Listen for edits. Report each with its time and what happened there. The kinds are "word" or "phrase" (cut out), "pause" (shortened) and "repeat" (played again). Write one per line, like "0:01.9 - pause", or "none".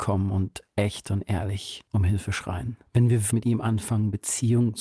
0:01.9 - pause
0:02.9 - pause
0:03.3 - word